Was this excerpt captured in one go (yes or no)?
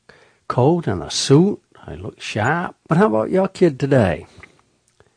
no